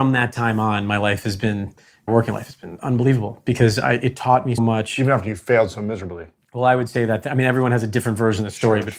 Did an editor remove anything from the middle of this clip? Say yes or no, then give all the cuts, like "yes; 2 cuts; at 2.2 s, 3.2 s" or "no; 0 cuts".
yes; 2 cuts; at 2.1 s, 4.6 s